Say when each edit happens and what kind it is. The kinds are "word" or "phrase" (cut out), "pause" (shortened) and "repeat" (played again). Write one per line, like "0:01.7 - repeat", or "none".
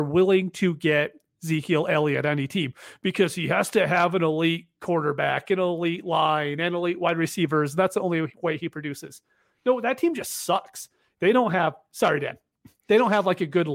none